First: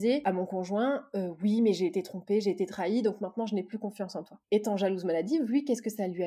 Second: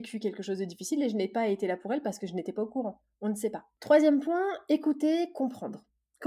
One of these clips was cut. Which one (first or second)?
first